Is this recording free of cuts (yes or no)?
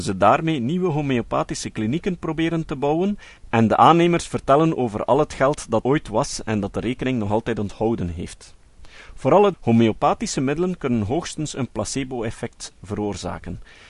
no